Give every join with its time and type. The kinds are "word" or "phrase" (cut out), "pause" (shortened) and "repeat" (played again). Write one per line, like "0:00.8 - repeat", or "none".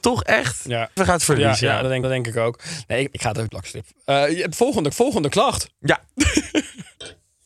0:01.0 - phrase
0:02.0 - repeat
0:03.1 - phrase
0:03.5 - phrase
0:04.9 - repeat